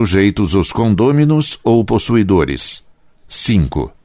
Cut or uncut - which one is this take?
cut